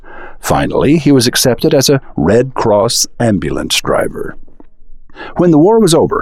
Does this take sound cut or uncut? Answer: uncut